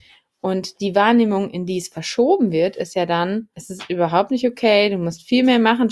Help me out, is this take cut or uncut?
cut